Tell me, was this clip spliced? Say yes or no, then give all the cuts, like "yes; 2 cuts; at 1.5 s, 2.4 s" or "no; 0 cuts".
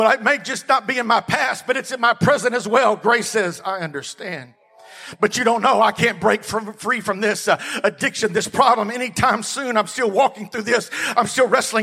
no; 0 cuts